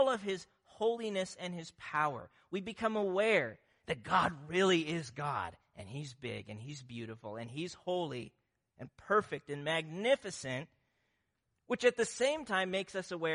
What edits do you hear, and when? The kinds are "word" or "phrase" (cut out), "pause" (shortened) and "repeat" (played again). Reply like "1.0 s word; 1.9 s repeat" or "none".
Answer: none

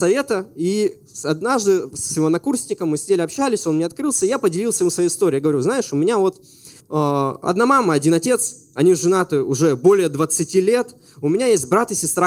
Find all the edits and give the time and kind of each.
6.8 s pause

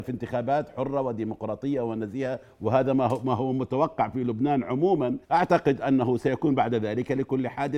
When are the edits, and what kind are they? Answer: 5.2 s pause

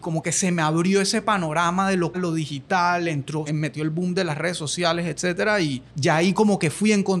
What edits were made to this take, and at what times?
2.1 s word; 3.5 s word; 5.9 s pause

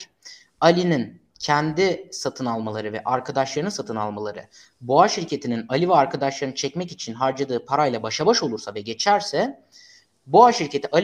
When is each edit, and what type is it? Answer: none

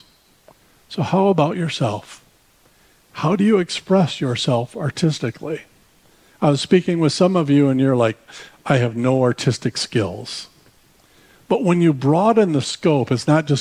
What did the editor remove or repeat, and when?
none

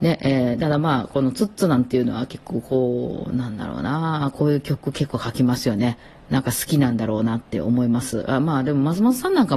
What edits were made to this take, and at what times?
none

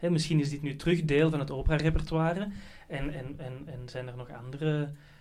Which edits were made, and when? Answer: none

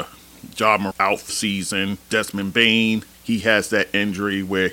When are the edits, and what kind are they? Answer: 0.9 s word; 1.3 s word; 2.0 s pause; 3.1 s pause

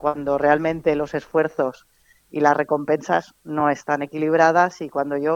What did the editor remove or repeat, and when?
none

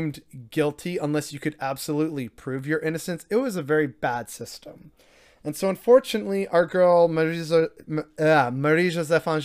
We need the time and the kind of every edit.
none

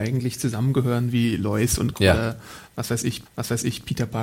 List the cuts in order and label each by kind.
1.9 s word; 3.3 s repeat

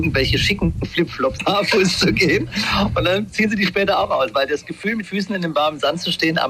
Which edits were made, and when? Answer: 1.4 s phrase; 5.0 s word

